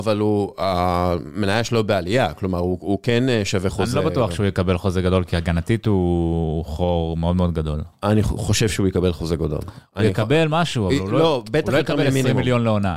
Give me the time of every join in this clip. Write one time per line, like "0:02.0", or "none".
none